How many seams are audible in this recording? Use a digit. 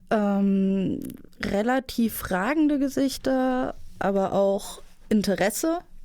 0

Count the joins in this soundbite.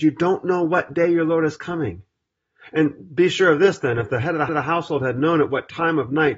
1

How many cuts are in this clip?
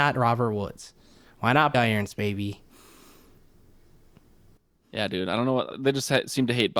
2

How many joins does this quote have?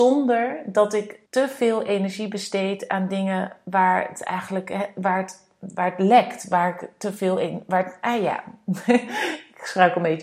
1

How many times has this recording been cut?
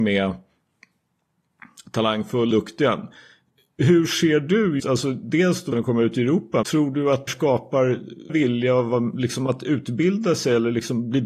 6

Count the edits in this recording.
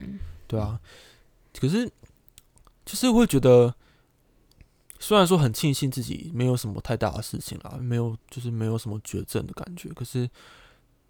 1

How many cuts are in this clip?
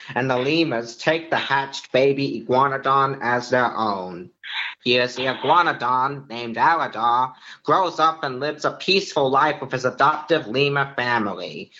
1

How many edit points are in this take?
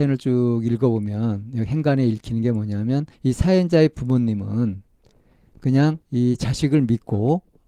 2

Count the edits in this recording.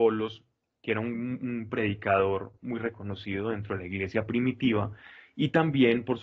0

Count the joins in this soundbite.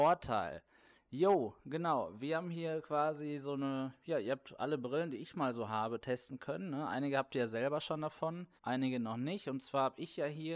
1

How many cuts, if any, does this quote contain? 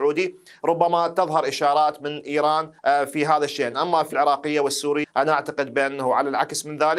3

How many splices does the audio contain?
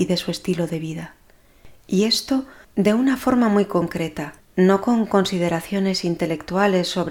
2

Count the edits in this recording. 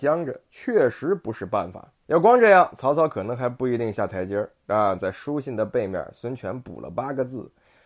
1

